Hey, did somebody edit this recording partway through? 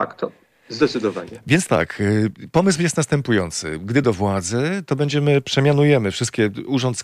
yes; 2 cuts; at 1.7 s, 4.0 s

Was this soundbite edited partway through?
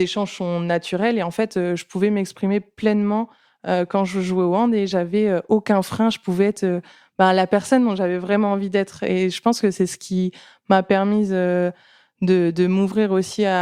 no; 0 cuts

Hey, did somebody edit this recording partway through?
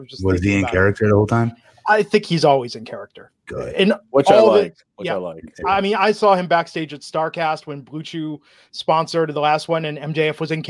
no; 0 cuts

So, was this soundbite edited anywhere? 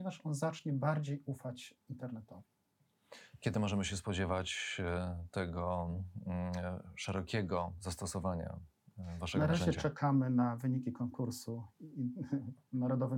no; 0 cuts

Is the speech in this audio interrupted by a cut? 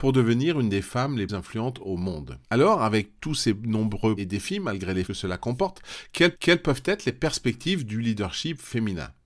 yes; 5 cuts; at 1.3 s, 2.4 s, 4.2 s, 5.1 s, 6.3 s

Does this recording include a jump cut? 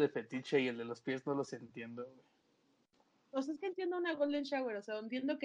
no; 0 cuts

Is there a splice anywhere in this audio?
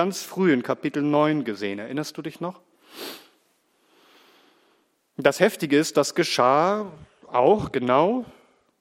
no; 0 cuts

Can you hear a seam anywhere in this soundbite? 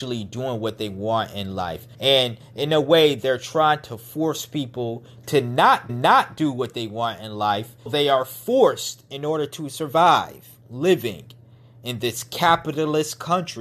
yes; 4 cuts; at 1.9 s, 5.9 s, 7.9 s, 10.6 s

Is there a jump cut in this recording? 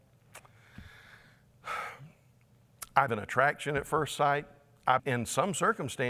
yes; 2 cuts; at 3.1 s, 5.0 s

